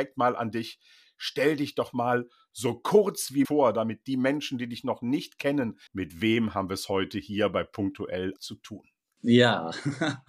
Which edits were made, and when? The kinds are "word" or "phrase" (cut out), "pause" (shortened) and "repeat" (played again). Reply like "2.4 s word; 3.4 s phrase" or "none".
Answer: 3.4 s word; 5.9 s word; 8.4 s word